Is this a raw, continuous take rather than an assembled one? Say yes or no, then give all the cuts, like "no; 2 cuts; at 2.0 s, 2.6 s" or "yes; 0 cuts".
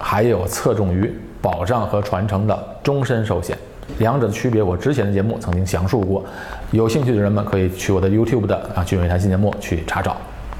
yes; 0 cuts